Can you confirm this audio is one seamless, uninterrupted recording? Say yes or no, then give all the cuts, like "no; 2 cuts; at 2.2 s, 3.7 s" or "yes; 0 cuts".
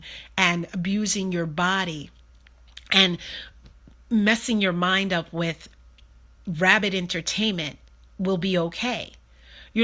yes; 0 cuts